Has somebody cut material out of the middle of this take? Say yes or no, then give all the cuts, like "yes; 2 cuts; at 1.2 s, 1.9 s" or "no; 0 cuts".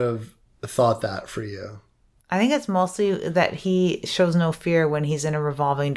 no; 0 cuts